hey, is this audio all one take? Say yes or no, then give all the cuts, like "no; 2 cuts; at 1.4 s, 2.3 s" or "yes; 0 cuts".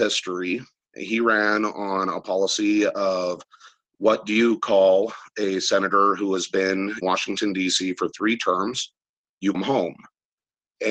no; 2 cuts; at 7.0 s, 9.5 s